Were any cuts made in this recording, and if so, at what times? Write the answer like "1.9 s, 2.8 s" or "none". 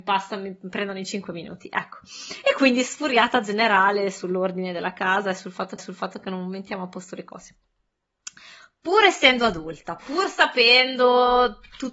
5.8 s

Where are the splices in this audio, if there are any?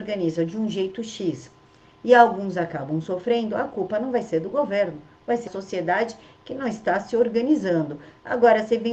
5.5 s

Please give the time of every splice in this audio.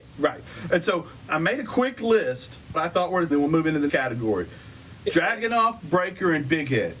1.3 s, 2.7 s, 3.3 s, 3.9 s

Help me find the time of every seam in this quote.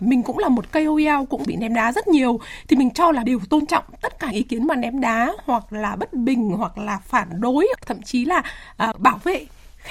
1.5 s, 3.2 s, 4.3 s, 7.8 s, 8.9 s

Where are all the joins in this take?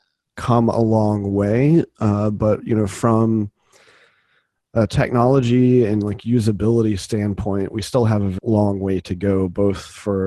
8.4 s

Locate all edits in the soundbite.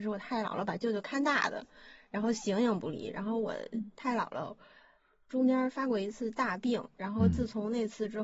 none

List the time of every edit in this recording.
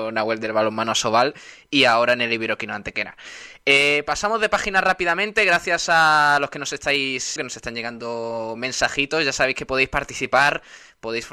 7.4 s

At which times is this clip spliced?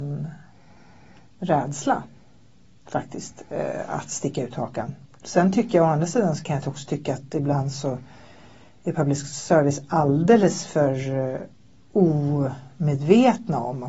none

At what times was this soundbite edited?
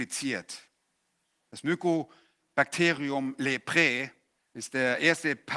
4.4 s

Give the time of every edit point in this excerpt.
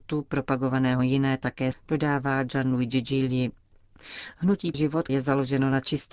1.0 s, 1.7 s, 4.7 s, 5.1 s

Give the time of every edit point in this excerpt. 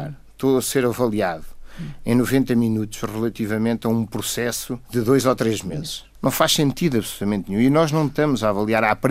4.8 s, 6.1 s

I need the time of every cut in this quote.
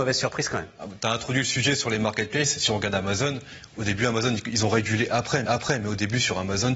5.5 s

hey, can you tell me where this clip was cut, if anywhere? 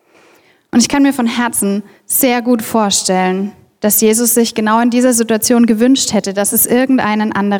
none

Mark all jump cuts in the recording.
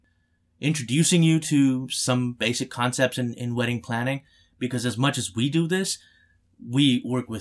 none

